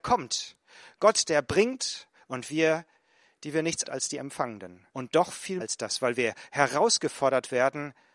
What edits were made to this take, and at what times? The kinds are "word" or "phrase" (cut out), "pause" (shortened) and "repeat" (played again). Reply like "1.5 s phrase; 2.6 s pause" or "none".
3.8 s phrase; 4.9 s pause; 5.6 s word